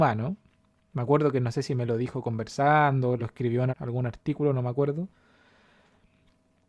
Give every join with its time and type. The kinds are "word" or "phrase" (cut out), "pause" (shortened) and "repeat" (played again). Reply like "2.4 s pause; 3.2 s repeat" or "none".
3.2 s word; 3.7 s word